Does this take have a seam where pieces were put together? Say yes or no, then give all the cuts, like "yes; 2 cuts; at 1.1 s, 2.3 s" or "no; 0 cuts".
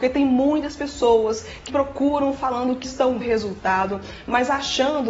yes; 3 cuts; at 1.7 s, 2.8 s, 3.2 s